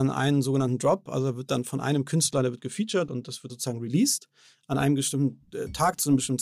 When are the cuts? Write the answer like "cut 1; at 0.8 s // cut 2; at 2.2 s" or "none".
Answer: cut 1; at 3.5 s